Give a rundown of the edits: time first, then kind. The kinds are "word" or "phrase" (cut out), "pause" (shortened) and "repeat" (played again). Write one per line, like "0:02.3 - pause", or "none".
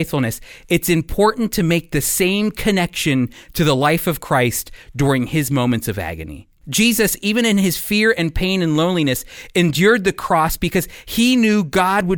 0:06.6 - pause